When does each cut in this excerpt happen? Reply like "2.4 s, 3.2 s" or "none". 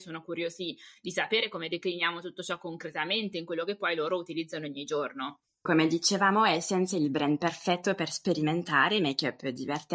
none